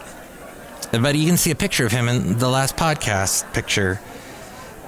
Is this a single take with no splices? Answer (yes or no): yes